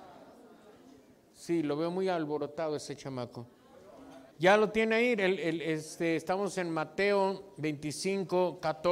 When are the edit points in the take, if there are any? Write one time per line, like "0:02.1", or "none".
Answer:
0:04.3